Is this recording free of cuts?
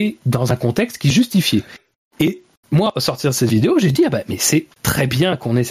yes; 0 cuts

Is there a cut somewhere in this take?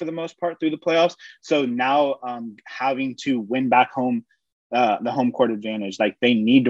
no; 0 cuts

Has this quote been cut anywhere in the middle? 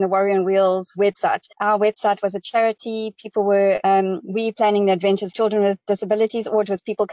yes; 3 cuts; at 1.5 s, 3.8 s, 5.3 s

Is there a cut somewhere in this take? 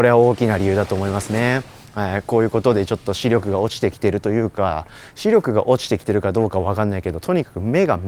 no; 0 cuts

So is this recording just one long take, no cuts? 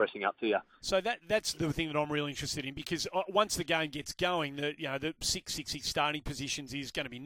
yes; 0 cuts

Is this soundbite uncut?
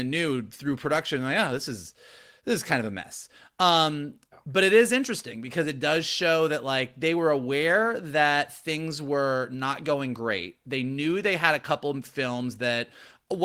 yes; 0 cuts

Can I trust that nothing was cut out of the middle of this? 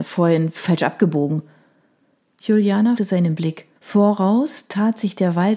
no; 2 cuts; at 3.0 s, 3.7 s

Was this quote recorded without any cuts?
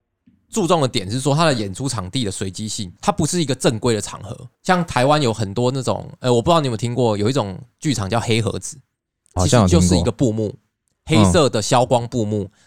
no; 3 cuts; at 3.0 s, 4.5 s, 9.4 s

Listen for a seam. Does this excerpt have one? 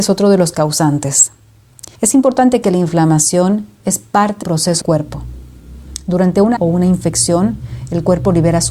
yes; 5 cuts; at 2.0 s, 2.6 s, 4.4 s, 4.8 s, 6.6 s

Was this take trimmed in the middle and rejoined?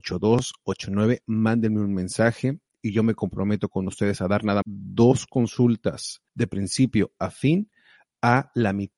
yes; 2 cuts; at 4.6 s, 6.3 s

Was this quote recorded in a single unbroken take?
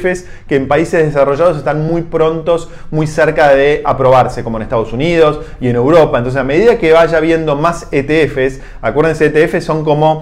yes; 0 cuts

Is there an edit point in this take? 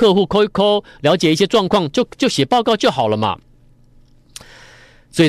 no; 0 cuts

